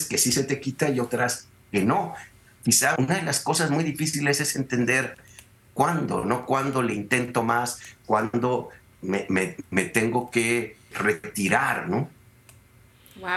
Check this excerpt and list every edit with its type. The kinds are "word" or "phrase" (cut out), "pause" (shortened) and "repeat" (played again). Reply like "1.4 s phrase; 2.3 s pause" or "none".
3.0 s word; 8.9 s word; 10.9 s word